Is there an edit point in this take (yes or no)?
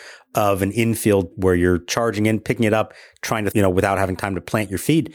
yes